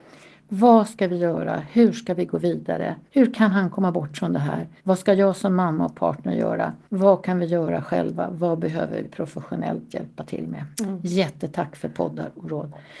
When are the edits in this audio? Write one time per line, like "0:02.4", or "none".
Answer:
0:03.1
0:04.8
0:06.8
0:10.7